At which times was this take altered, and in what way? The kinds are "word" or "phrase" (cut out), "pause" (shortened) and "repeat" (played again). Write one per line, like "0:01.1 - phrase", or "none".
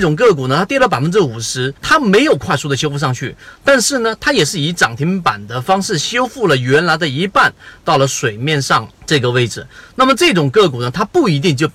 0:01.8 - pause
0:07.8 - phrase
0:08.9 - pause

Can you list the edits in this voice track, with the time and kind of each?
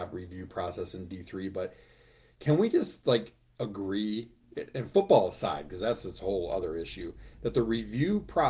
none

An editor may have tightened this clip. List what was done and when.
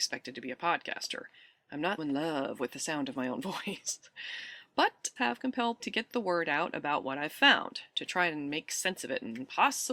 0:02.0 - word
0:05.2 - word
0:05.8 - word

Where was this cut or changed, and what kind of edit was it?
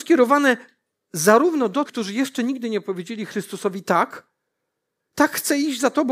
0:01.9 - word

